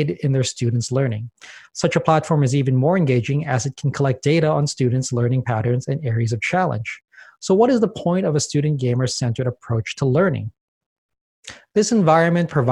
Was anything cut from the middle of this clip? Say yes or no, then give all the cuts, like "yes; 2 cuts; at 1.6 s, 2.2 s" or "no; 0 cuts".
no; 0 cuts